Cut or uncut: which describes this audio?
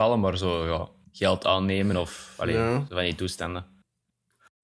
uncut